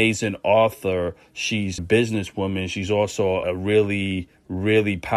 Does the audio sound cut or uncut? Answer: cut